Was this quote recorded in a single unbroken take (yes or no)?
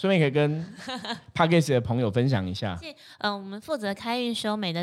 yes